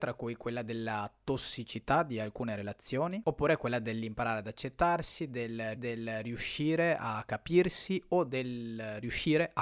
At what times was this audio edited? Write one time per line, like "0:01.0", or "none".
0:05.8